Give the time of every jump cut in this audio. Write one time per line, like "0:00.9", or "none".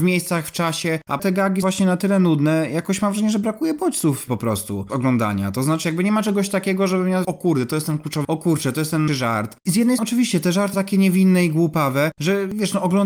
0:01.2
0:01.6
0:04.9
0:05.8
0:07.2
0:08.2
0:09.1
0:10.0
0:10.7